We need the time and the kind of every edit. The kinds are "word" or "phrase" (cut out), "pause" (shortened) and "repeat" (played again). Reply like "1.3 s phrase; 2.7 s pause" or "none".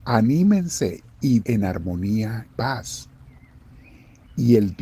1.4 s word; 2.5 s word